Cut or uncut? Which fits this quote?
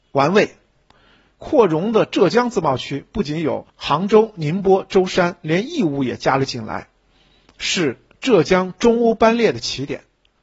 cut